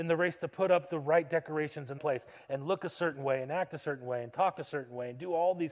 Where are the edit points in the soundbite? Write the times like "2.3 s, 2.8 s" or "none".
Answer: 2.0 s